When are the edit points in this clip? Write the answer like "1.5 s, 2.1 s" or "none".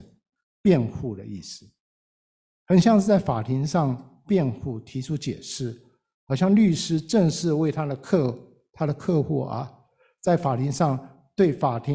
none